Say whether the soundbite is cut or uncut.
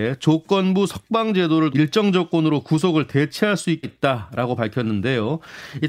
cut